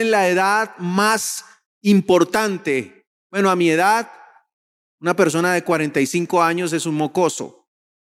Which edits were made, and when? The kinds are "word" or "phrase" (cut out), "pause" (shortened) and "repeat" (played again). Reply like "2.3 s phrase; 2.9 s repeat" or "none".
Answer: none